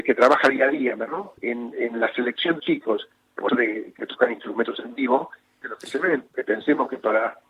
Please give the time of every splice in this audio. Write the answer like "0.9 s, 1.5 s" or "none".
1.1 s, 1.4 s, 2.6 s, 3.5 s, 4.0 s, 5.6 s, 6.3 s